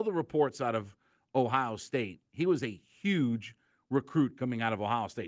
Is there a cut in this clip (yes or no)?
no